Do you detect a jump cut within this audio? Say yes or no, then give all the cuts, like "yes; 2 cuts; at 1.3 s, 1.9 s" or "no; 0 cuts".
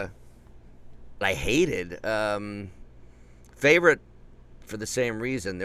yes; 2 cuts; at 1.2 s, 4.7 s